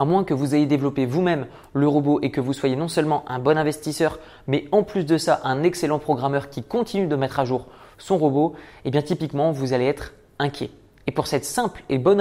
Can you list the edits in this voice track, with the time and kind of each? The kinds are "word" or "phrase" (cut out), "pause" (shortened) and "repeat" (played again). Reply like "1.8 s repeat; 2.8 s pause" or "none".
none